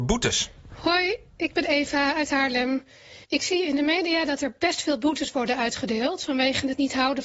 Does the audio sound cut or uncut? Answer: cut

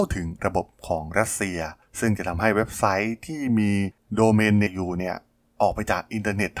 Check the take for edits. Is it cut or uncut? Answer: cut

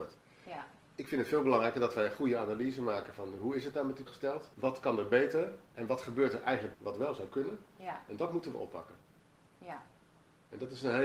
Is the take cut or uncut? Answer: cut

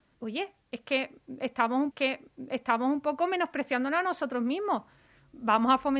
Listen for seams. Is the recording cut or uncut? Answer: cut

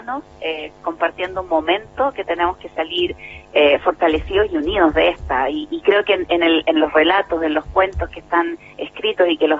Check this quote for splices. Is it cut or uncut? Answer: uncut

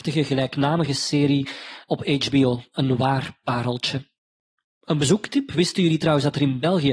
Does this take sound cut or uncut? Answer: uncut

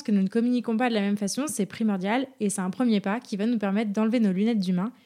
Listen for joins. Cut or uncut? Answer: uncut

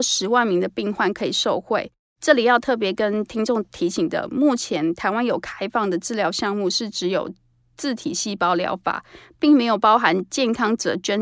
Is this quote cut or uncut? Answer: uncut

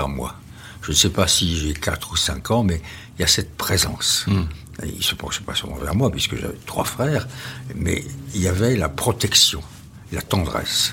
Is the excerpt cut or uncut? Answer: uncut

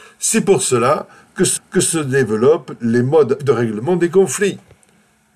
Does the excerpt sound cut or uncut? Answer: cut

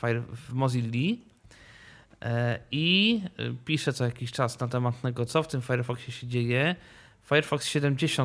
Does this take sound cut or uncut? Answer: uncut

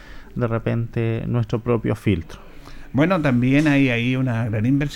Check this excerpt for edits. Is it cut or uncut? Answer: uncut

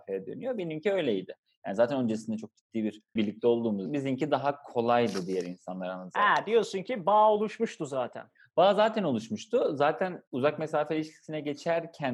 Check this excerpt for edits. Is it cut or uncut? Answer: cut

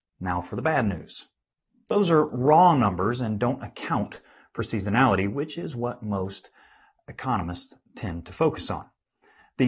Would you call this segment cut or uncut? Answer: uncut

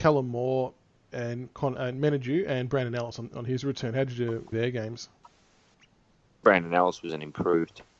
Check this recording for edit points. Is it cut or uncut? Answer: cut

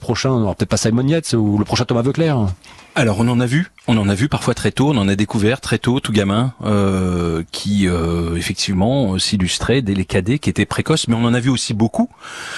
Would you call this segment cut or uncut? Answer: cut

